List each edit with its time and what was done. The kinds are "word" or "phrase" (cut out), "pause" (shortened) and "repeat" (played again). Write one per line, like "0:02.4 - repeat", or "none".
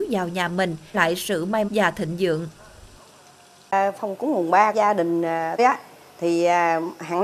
0:00.9 - word
0:01.7 - word
0:04.2 - word
0:04.7 - word
0:05.6 - word